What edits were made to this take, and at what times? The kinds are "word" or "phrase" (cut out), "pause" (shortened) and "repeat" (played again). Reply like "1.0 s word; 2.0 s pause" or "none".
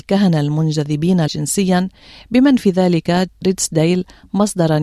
1.3 s word; 3.3 s word